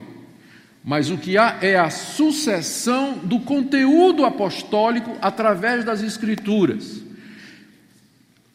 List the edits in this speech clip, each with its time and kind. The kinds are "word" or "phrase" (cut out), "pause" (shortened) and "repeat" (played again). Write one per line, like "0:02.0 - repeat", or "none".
none